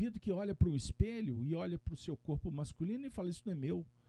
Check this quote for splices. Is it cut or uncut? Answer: uncut